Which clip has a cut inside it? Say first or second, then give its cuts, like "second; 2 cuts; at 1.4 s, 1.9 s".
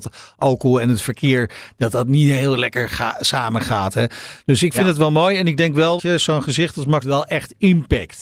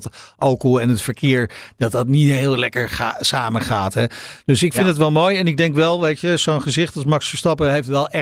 first; 2 cuts; at 6.0 s, 7.0 s